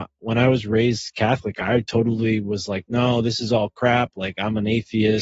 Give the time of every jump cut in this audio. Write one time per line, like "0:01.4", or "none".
none